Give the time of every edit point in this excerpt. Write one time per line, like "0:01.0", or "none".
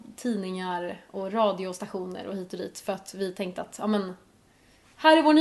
none